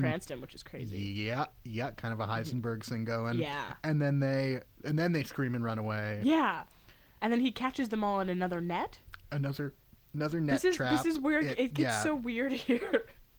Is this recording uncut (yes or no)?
no